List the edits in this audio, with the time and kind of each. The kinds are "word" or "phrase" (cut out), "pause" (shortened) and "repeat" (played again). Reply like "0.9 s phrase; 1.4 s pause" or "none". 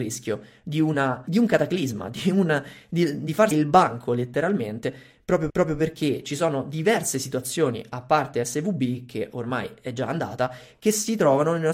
3.5 s word; 5.5 s repeat